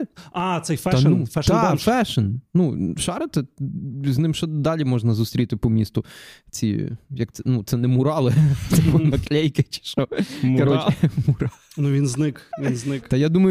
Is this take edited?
no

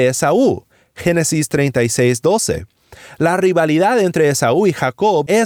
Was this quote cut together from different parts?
no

